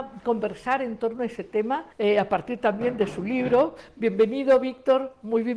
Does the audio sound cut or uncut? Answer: cut